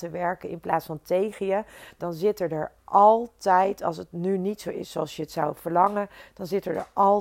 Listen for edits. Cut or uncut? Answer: uncut